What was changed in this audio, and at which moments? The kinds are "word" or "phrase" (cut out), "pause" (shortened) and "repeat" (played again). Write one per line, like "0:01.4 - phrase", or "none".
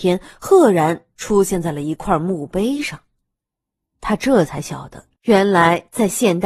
0:05.2 - pause